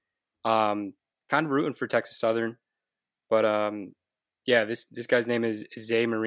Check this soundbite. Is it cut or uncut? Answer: uncut